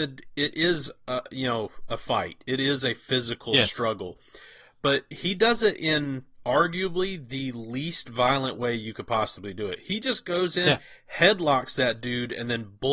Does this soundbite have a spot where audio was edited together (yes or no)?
no